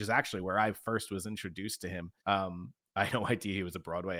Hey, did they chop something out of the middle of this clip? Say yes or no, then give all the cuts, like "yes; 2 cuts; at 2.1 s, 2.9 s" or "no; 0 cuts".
yes; 2 cuts; at 2.2 s, 3.1 s